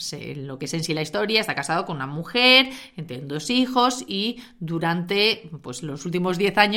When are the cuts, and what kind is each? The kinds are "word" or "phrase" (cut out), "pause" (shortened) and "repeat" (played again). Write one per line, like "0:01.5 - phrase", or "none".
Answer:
none

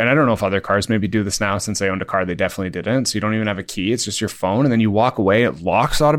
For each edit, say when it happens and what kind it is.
none

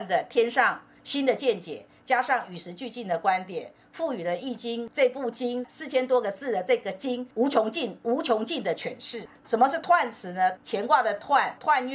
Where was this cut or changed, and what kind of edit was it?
0:07.3 - pause

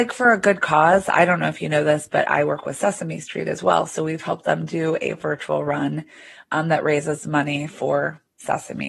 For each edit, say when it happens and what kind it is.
none

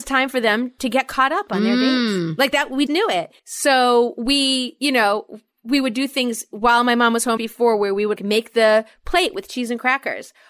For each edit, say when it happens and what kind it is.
0:02.9 - word
0:03.4 - pause
0:07.4 - phrase
0:08.2 - word

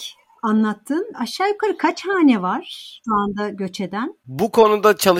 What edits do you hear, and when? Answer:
none

